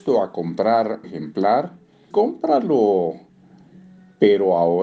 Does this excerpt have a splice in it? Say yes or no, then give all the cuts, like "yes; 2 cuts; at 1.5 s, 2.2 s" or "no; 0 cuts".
yes; 2 cuts; at 1.0 s, 2.1 s